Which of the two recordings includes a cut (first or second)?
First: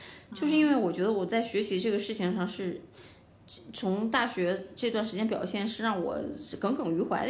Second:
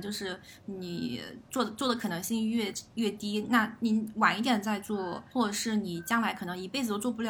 second